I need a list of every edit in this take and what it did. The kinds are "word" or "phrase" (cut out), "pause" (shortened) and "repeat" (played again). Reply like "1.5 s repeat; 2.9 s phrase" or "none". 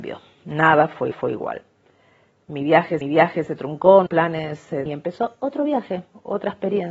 1.1 s repeat; 3.0 s repeat; 4.1 s word; 4.9 s word